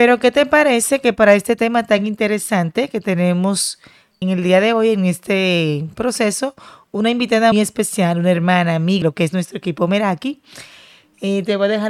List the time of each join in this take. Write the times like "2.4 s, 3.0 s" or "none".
4.2 s, 7.5 s, 9.0 s